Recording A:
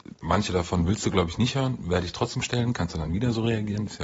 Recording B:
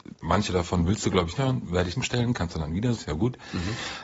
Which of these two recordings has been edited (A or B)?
B